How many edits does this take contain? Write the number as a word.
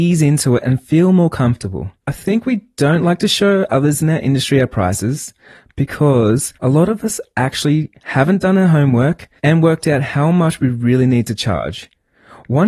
three